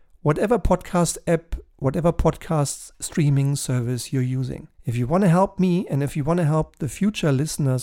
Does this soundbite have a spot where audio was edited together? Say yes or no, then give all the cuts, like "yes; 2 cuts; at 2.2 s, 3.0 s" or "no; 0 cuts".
yes; 1 cut; at 4.7 s